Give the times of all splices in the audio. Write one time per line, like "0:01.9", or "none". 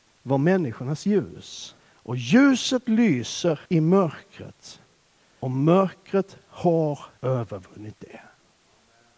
0:01.8
0:03.7
0:05.4
0:07.2